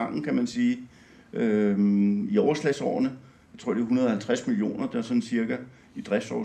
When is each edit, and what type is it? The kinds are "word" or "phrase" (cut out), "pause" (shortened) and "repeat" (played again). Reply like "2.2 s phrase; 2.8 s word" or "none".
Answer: none